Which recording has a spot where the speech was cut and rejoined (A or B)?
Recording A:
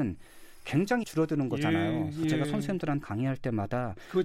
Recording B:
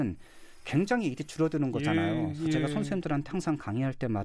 A